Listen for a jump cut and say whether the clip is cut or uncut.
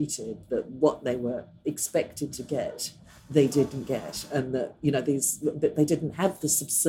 uncut